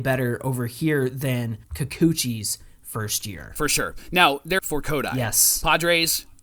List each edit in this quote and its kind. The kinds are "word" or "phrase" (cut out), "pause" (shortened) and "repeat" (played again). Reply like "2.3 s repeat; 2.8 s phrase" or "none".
1.6 s pause; 4.6 s phrase